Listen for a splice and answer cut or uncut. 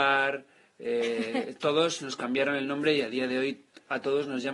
uncut